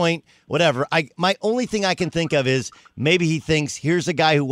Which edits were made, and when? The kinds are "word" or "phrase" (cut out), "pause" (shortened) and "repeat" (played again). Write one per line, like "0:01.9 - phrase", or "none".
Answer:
0:01.1 - word